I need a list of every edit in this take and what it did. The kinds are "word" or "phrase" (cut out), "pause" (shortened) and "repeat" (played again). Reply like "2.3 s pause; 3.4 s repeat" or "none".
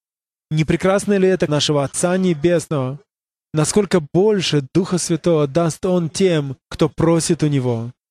1.5 s word; 6.6 s pause